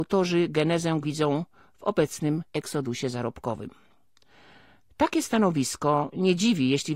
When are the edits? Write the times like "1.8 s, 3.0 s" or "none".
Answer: 1.0 s, 2.5 s